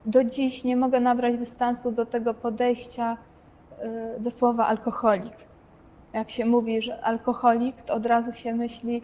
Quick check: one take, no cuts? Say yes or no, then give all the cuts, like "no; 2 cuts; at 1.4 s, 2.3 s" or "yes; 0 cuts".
yes; 0 cuts